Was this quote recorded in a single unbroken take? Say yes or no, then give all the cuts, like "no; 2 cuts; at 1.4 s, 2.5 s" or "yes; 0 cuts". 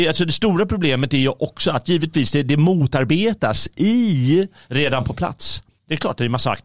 yes; 0 cuts